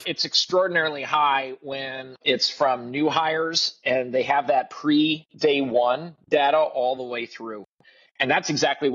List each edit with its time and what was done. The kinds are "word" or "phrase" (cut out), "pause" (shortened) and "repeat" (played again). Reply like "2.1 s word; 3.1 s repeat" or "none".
none